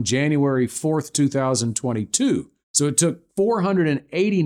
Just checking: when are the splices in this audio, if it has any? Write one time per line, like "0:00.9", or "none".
0:02.6
0:03.3